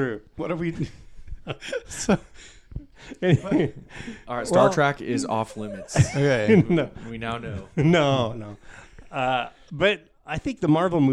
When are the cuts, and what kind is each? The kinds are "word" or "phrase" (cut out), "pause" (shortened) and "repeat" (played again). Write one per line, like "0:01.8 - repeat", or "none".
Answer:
0:03.9 - pause